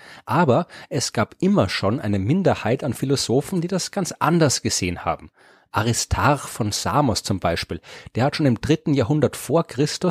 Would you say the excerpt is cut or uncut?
uncut